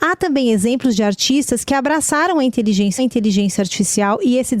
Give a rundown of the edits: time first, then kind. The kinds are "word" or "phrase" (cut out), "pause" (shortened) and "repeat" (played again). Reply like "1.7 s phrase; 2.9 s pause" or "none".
3.0 s repeat